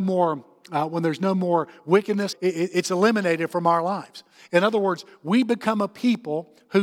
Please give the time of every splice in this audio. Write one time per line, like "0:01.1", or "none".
0:02.3